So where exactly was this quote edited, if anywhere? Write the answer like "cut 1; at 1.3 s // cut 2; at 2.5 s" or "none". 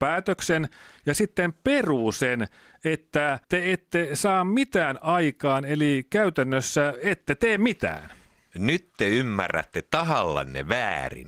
cut 1; at 3.4 s